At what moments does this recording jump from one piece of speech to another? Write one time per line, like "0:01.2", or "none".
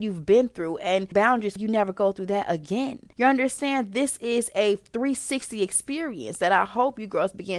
0:01.1
0:01.6
0:03.1

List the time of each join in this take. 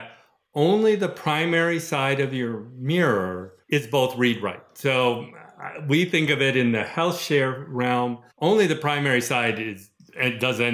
0:03.6
0:08.3

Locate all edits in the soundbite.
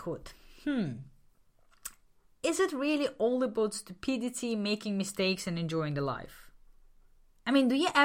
none

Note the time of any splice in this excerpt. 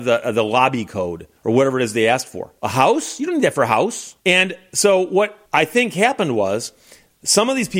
0:01.4
0:02.6
0:04.2
0:05.5

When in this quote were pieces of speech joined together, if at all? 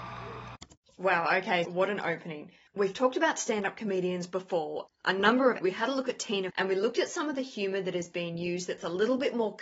0:01.6
0:05.6
0:06.5

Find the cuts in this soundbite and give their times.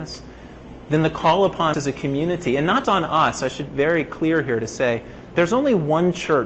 0:01.7
0:02.8
0:03.7
0:05.3

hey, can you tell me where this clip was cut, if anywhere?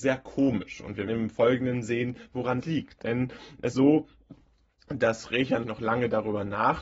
0:01.1
0:02.6
0:03.7
0:05.6

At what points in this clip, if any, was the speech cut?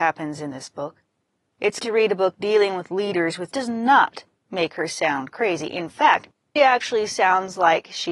0:01.8
0:03.5
0:06.6

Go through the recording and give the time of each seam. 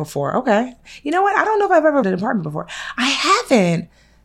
0:02.0

